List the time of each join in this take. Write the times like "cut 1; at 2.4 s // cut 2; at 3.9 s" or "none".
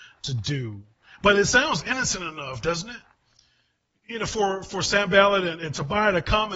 none